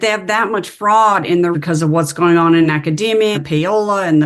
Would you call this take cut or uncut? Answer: cut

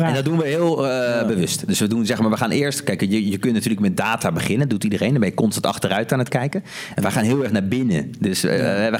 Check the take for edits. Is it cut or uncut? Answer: uncut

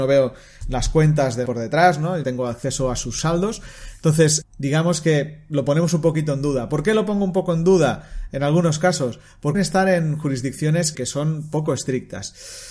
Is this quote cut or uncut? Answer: cut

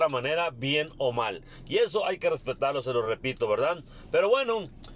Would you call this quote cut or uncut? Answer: uncut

